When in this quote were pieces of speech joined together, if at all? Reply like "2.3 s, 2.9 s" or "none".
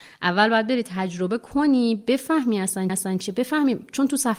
2.9 s